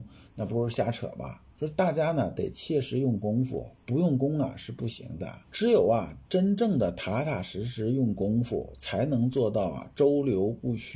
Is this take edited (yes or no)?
yes